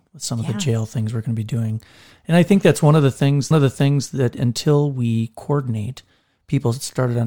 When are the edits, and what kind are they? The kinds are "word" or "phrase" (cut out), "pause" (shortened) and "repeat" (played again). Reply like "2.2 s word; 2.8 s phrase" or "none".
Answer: 3.5 s repeat